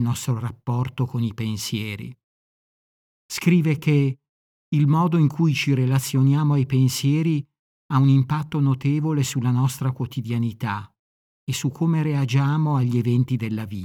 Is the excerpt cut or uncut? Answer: uncut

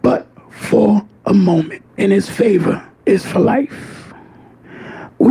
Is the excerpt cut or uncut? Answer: cut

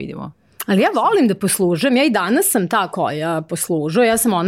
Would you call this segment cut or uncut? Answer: uncut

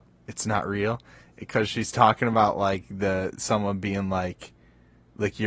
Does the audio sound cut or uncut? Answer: uncut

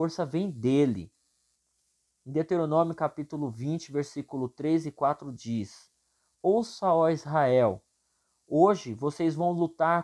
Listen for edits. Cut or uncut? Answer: uncut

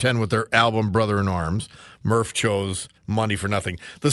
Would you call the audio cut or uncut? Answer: cut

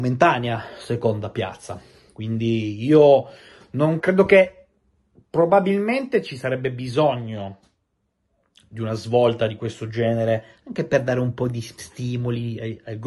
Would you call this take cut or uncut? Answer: cut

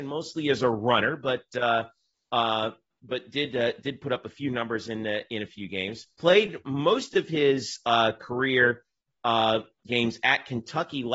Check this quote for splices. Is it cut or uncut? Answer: cut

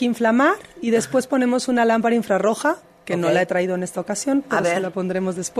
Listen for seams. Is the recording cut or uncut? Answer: uncut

